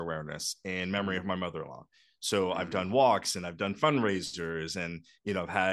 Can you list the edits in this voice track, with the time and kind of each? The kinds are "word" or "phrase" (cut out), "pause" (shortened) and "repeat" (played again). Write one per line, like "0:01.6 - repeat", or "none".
none

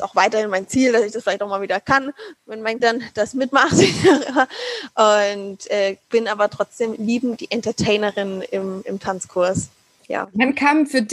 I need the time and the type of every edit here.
0:02.4 - word
0:02.8 - word
0:06.0 - pause
0:07.4 - word
0:10.0 - pause

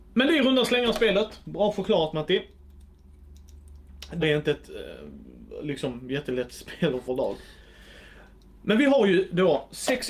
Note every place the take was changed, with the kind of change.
0:04.2 - word
0:07.1 - word

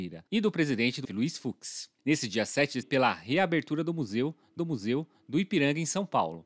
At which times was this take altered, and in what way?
0:01.0 - word
0:02.0 - pause
0:02.8 - phrase
0:04.6 - repeat

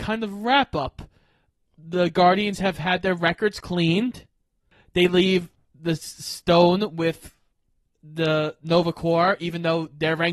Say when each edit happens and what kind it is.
none

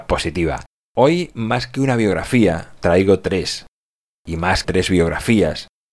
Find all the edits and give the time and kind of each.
0:02.8 - word
0:04.6 - word

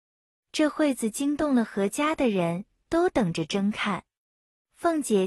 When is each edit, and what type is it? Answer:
none

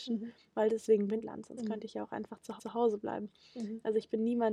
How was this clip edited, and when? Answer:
0:01.2 - phrase
0:02.6 - repeat

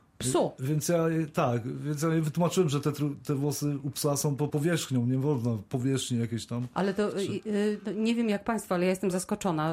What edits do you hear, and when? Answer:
0:04.5 - word

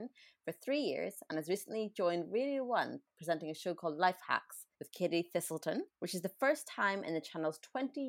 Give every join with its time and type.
0:04.7 - pause
0:05.9 - pause

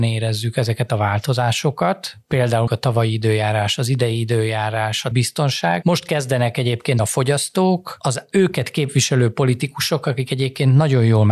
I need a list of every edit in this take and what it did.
0:02.7 - word
0:05.1 - word
0:07.0 - word

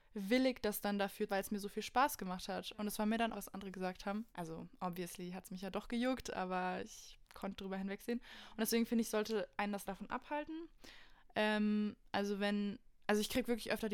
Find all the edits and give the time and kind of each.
0:01.3 - phrase
0:03.3 - phrase
0:04.3 - pause
0:07.2 - pause
0:09.8 - word

